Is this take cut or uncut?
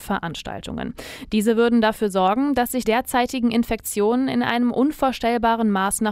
cut